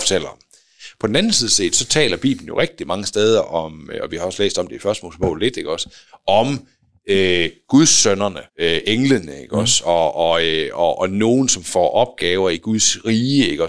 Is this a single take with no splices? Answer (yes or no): no